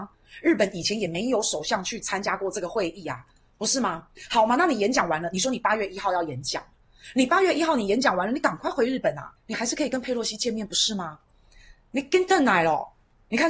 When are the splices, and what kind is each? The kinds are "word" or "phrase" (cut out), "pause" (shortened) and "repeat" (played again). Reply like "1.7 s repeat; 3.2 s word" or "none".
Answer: 9.4 s pause